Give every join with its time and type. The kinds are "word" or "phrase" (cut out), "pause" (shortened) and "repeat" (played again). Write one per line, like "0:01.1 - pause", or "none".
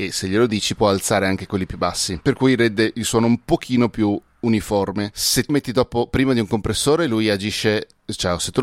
0:05.5 - word